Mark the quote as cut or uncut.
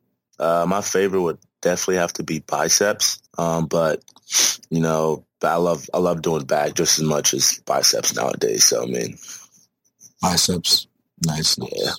cut